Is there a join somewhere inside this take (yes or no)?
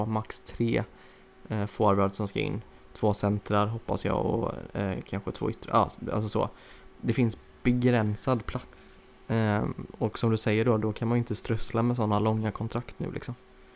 no